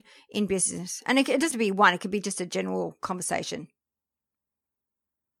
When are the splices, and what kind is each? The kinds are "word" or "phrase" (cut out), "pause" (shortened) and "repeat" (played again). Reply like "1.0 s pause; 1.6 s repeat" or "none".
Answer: 1.5 s word

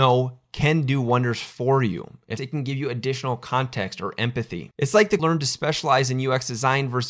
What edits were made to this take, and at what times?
2.4 s phrase; 5.2 s phrase

